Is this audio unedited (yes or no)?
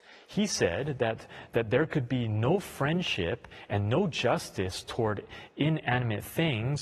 yes